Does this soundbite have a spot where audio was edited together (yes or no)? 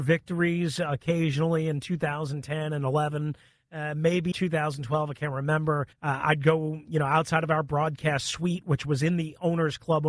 yes